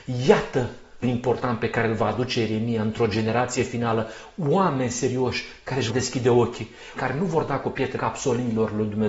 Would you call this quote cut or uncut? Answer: cut